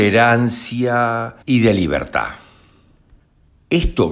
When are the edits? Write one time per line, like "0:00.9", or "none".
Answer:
0:01.4